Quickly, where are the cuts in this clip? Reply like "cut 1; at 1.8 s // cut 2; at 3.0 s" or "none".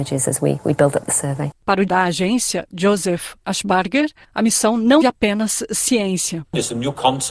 cut 1; at 1.9 s // cut 2; at 5.0 s